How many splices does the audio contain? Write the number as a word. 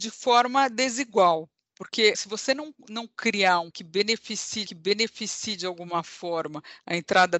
three